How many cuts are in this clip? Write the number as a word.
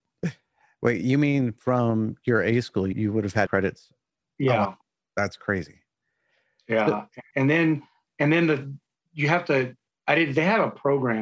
three